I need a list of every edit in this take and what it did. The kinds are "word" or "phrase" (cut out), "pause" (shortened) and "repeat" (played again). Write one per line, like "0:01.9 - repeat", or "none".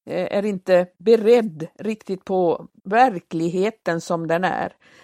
0:00.9 - pause
0:02.8 - pause